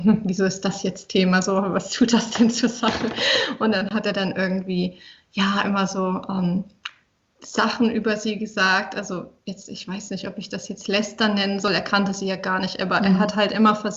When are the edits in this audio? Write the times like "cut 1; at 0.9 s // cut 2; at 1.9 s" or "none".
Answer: none